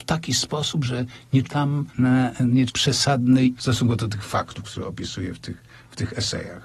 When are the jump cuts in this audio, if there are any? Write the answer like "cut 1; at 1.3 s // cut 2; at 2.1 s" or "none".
cut 1; at 1.4 s // cut 2; at 1.9 s // cut 3; at 2.7 s // cut 4; at 3.6 s